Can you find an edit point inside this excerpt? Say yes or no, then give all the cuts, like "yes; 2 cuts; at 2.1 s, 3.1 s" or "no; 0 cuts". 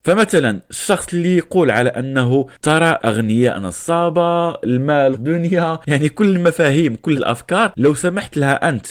yes; 3 cuts; at 3.0 s, 5.1 s, 7.1 s